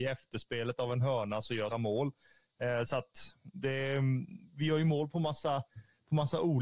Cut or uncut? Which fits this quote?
cut